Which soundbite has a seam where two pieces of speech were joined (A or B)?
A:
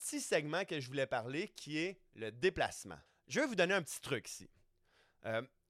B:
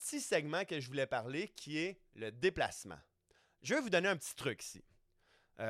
A